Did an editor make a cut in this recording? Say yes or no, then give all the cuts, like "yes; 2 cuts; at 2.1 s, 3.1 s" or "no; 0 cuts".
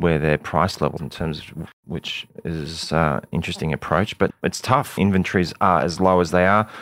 yes; 5 cuts; at 1.0 s, 1.7 s, 3.3 s, 4.3 s, 5.0 s